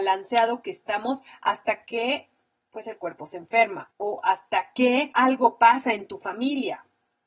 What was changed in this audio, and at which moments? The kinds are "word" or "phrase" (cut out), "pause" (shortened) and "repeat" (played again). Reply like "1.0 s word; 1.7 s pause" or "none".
none